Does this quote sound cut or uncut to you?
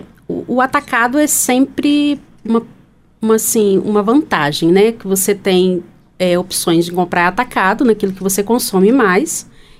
uncut